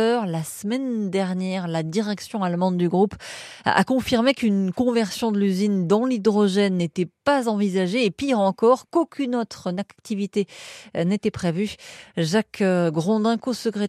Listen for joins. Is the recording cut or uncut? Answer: uncut